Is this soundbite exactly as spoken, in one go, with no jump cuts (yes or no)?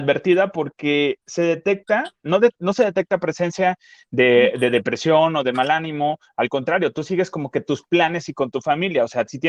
yes